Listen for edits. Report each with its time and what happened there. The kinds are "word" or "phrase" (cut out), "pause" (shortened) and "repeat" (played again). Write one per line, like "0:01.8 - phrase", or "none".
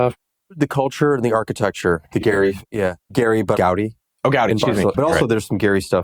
0:03.6 - word
0:04.9 - word